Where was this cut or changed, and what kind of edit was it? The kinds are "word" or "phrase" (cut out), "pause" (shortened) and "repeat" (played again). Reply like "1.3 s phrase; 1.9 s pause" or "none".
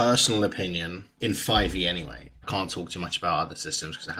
1.2 s word; 2.4 s word